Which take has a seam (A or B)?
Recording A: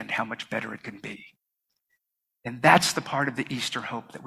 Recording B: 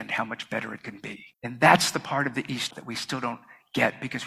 B